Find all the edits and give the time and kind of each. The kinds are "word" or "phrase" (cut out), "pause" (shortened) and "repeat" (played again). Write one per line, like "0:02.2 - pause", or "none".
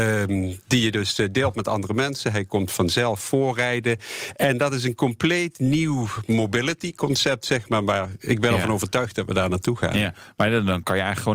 none